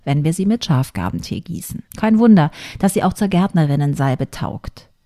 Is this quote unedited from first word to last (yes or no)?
no